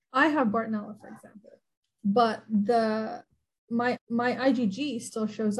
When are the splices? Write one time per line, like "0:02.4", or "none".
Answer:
0:01.7
0:03.9